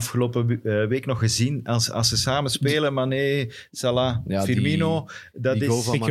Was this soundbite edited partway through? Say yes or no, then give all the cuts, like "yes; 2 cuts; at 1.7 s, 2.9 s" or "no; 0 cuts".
no; 0 cuts